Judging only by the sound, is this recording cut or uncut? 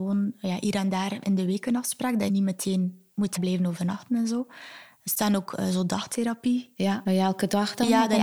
cut